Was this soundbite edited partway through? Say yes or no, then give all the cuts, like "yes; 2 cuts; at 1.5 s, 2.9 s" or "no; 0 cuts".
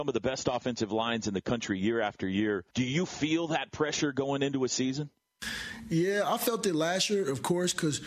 yes; 1 cut; at 2.7 s